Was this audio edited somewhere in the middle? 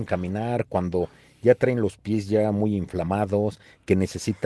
no; 0 cuts

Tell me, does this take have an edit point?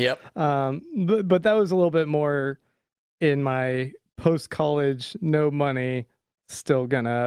no; 0 cuts

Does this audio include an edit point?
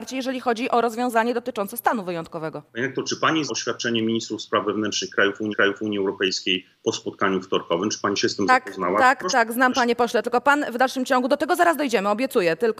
yes; 3 cuts; at 2.7 s, 3.5 s, 5.5 s

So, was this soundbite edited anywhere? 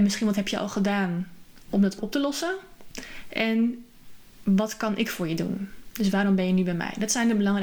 yes; 1 cut; at 2.0 s

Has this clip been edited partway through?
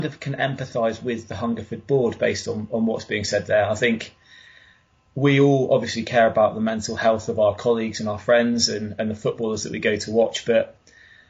no; 0 cuts

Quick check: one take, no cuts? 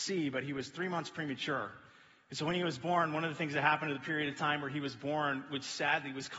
yes; 0 cuts

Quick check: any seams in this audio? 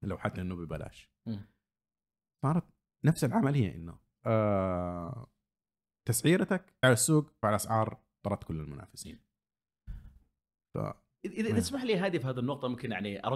yes; 3 cuts; at 4.2 s, 6.8 s, 7.4 s

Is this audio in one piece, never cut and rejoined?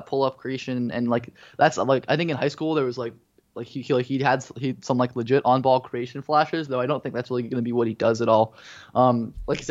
yes; 0 cuts

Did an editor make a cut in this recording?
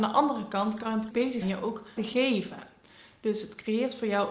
yes; 3 cuts; at 1.1 s, 1.4 s, 2.0 s

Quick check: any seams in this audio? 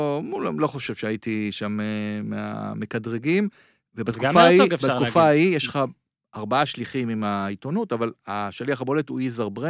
no; 0 cuts

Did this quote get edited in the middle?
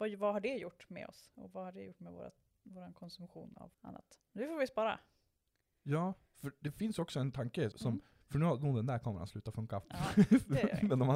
yes; 2 cuts; at 3.7 s, 7.7 s

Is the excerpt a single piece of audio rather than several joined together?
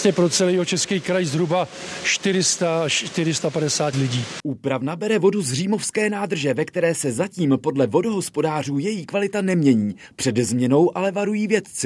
no; 1 cut; at 3.9 s

